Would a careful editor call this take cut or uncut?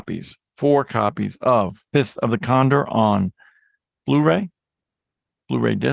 cut